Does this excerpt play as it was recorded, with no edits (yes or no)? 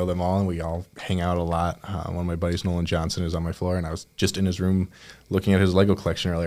yes